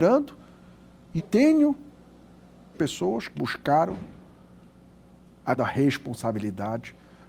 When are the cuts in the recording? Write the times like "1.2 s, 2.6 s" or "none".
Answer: 1.2 s, 2.7 s, 3.4 s, 5.6 s